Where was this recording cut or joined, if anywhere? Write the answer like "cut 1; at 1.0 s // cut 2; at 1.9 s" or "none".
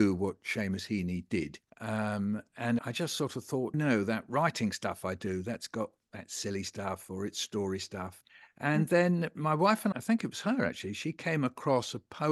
cut 1; at 1.7 s // cut 2; at 2.8 s // cut 3; at 3.7 s // cut 4; at 8.3 s // cut 5; at 9.9 s